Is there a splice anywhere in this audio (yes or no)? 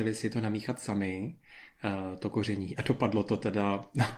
no